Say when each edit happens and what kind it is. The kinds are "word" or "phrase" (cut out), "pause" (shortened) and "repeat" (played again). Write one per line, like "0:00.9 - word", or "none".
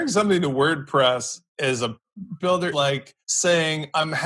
0:01.5 - pause
0:02.4 - word
0:02.7 - word
0:03.2 - pause

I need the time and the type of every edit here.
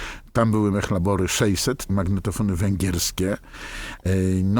0:01.9 - word

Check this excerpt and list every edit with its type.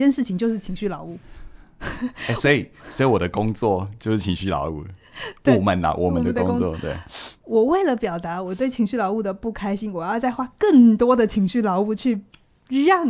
0:01.6 - pause
0:07.4 - pause

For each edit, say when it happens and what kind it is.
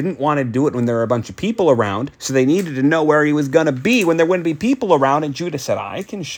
0:02.1 - pause

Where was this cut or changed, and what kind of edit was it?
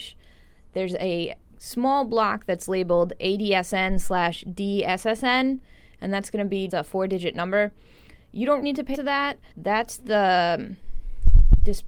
0:01.4 - pause
0:06.7 - word
0:08.6 - word
0:08.9 - word
0:09.5 - pause

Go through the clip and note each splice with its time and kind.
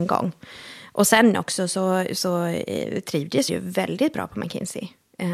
0:03.5 - word

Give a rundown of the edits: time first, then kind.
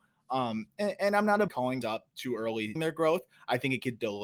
0:01.5 - phrase
0:01.8 - word
0:02.8 - word

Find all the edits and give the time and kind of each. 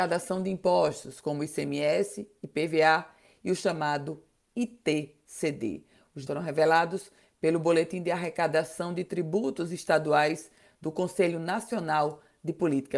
0:06.3 - word

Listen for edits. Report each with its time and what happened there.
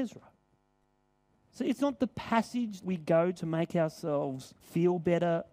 0:02.8 - word
0:03.3 - word
0:04.6 - pause

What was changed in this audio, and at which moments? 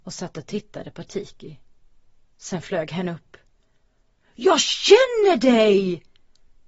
none

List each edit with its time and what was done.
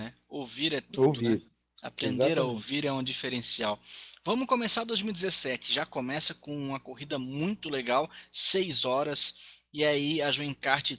none

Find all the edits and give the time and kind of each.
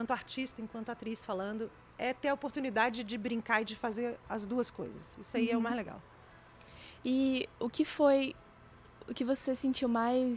none

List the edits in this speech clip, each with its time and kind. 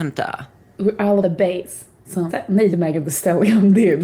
0:01.2 - word
0:02.3 - word
0:02.7 - word

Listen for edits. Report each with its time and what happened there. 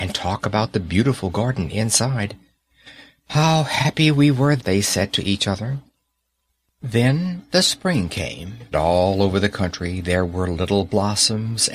0:04.6 - word
0:08.7 - word

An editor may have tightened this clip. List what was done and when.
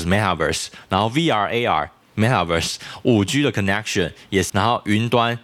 0:02.0 - phrase
0:04.5 - word

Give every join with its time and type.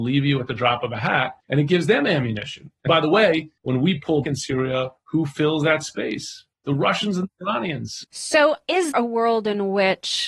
0:01.4 - pause
0:02.9 - word
0:03.6 - pause
0:04.2 - word
0:06.5 - pause
0:08.9 - word

